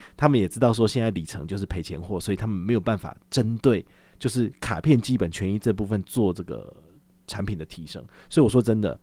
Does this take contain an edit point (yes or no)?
yes